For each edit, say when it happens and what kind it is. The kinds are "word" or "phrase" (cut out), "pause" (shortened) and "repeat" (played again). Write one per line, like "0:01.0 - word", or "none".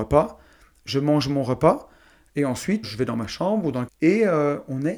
0:02.8 - phrase
0:03.9 - word